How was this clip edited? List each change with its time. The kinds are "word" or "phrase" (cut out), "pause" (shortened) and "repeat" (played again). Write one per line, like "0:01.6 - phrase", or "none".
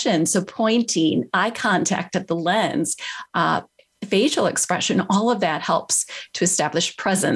none